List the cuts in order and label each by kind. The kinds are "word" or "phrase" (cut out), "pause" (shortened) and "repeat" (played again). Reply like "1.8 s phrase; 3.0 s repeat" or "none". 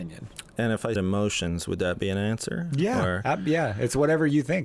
1.0 s word